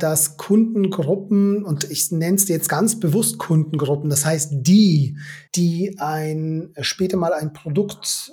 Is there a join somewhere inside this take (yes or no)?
yes